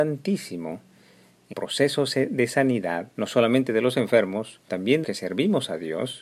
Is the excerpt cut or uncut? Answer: cut